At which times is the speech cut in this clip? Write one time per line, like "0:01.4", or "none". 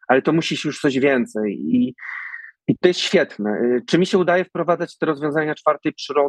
0:02.6